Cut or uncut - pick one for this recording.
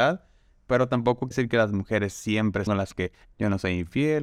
cut